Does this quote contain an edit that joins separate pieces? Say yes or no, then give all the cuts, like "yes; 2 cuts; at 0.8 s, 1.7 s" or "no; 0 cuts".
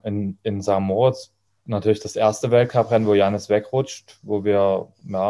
no; 0 cuts